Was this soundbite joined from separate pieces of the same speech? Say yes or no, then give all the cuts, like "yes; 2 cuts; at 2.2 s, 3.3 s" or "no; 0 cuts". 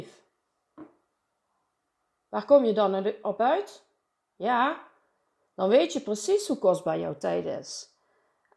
no; 0 cuts